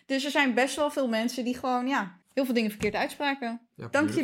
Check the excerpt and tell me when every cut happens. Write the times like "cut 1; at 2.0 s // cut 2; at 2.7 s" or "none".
cut 1; at 2.2 s